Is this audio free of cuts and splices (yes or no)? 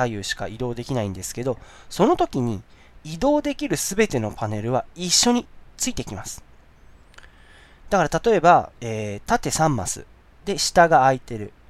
yes